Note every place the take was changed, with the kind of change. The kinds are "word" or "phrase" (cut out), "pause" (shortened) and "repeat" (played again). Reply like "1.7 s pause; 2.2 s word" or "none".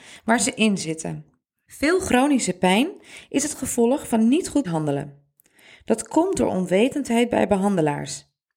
4.6 s word